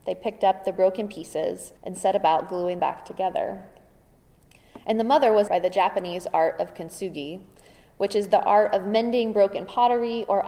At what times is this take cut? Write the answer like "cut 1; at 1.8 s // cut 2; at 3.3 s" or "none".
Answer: cut 1; at 1.8 s // cut 2; at 2.8 s // cut 3; at 5.5 s